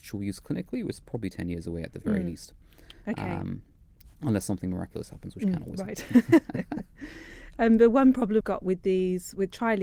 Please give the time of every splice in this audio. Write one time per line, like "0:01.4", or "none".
0:08.4